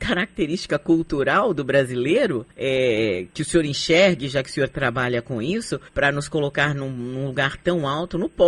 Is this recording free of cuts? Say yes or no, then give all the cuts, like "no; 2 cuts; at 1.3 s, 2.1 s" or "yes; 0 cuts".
no; 2 cuts; at 2.5 s, 5.9 s